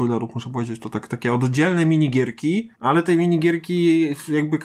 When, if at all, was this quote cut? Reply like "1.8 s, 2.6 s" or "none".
2.7 s